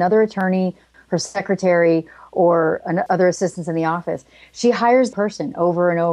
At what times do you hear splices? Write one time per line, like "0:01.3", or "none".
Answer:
0:03.1
0:05.1